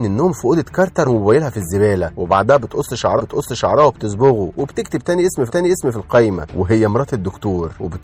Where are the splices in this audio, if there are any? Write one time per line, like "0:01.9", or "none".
0:01.0
0:03.2
0:05.5